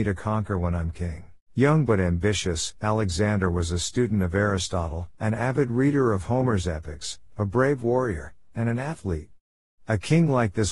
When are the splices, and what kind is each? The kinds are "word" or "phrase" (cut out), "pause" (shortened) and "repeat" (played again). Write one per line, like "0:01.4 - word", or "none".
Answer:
0:01.4 - pause
0:05.1 - pause